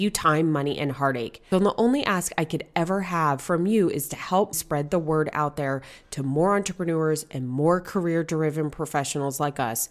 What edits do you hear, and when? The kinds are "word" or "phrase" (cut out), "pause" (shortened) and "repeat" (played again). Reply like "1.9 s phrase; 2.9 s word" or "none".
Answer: 1.5 s word; 4.5 s word